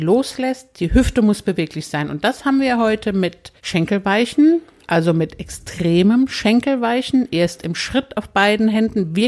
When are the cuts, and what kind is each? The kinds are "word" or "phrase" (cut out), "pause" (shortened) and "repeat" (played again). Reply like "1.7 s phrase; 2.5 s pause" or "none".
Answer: 3.6 s pause